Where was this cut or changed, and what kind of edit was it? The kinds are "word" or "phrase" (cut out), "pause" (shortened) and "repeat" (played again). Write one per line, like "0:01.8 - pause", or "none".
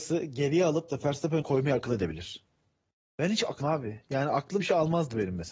0:01.4 - word
0:03.6 - word
0:04.6 - word